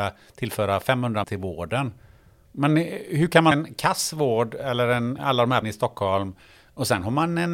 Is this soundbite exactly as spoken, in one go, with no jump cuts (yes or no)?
no